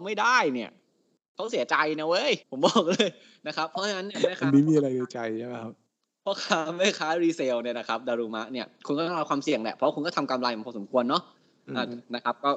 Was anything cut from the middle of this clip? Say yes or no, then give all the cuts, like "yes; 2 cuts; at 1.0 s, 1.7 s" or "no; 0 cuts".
yes; 1 cut; at 2.4 s